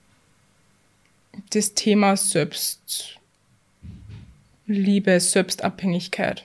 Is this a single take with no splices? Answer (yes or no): yes